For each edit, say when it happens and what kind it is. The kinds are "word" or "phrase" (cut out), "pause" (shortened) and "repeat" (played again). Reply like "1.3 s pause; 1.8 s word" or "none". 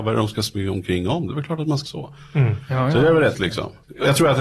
1.9 s word; 3.3 s word